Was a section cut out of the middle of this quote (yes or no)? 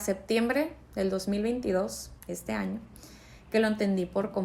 yes